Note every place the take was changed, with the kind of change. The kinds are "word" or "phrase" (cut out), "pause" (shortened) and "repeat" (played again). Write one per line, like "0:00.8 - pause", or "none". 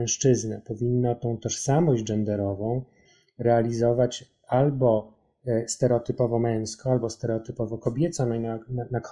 none